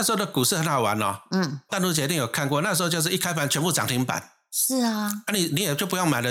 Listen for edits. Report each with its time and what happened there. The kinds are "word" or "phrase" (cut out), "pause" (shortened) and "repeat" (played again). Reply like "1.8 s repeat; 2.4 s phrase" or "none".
1.7 s word